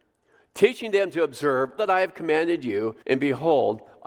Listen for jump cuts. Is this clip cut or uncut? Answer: cut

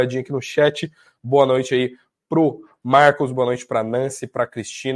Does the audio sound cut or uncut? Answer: uncut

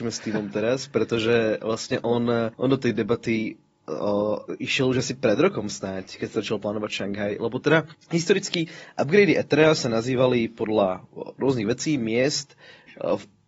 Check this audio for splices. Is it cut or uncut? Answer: cut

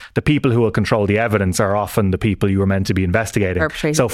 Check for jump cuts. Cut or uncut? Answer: uncut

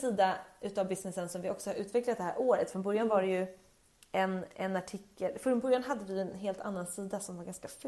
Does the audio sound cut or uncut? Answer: uncut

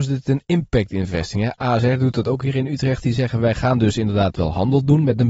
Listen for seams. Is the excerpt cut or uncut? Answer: uncut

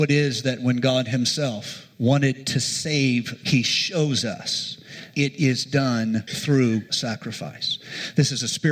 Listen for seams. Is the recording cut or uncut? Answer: cut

